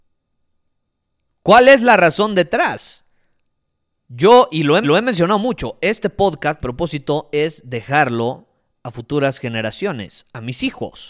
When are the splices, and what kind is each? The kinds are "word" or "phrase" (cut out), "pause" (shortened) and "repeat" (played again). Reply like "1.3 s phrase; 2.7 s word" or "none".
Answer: 4.8 s repeat; 6.6 s word